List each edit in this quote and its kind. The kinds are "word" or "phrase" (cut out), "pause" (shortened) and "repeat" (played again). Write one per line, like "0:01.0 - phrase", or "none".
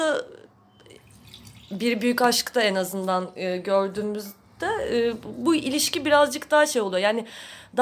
none